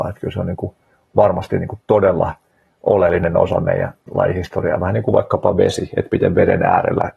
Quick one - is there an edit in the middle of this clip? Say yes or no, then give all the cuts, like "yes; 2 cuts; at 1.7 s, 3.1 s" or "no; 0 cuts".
no; 0 cuts